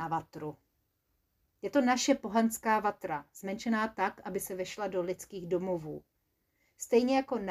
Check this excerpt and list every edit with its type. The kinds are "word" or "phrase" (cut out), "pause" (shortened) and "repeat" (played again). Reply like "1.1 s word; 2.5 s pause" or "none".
none